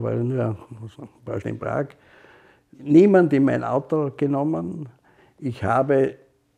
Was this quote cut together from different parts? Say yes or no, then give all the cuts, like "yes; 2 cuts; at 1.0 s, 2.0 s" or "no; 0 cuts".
yes; 2 cuts; at 0.9 s, 1.4 s